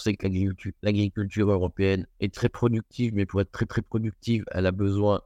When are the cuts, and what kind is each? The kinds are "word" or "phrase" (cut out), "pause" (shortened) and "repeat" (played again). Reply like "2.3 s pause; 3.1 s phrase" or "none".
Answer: 2.1 s pause; 3.7 s repeat